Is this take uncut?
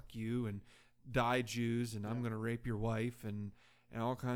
yes; 0 cuts

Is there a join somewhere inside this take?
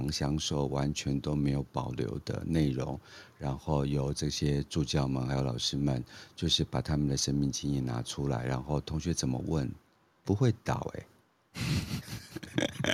yes; 1 cut; at 10.2 s

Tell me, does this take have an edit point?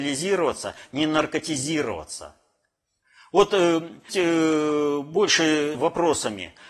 yes; 2 cuts; at 4.1 s, 5.7 s

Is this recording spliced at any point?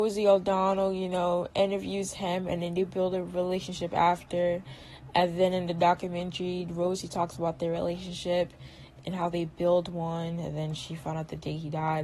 no; 0 cuts

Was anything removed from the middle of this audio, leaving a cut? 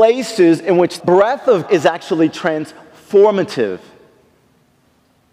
yes; 2 cuts; at 1.0 s, 1.7 s

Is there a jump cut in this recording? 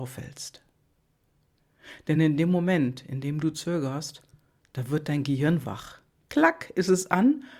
no; 0 cuts

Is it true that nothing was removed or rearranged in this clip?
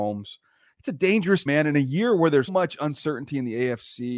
no; 2 cuts; at 1.5 s, 2.5 s

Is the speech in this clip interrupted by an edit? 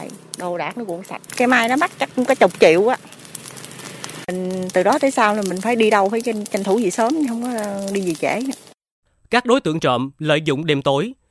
yes; 1 cut; at 9.0 s

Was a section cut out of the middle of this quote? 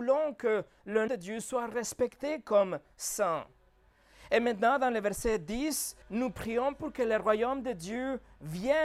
yes; 2 cuts; at 1.1 s, 6.0 s

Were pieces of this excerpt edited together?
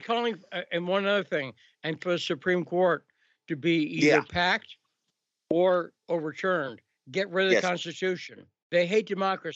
yes; 1 cut; at 2.0 s

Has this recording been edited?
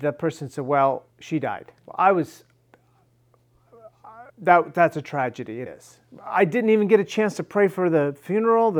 yes; 4 cuts; at 1.1 s, 1.8 s, 4.3 s, 5.7 s

